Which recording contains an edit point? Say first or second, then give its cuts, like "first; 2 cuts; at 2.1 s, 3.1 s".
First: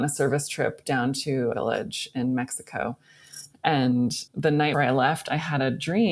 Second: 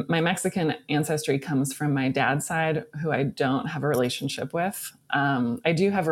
first; 3 cuts; at 1.5 s, 4.3 s, 4.7 s